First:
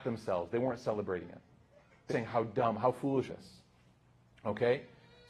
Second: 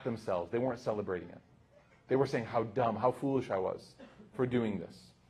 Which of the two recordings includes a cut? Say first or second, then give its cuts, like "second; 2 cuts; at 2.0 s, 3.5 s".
first; 2 cuts; at 2.1 s, 3.3 s